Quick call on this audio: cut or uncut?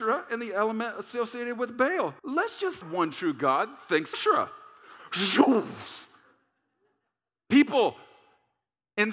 cut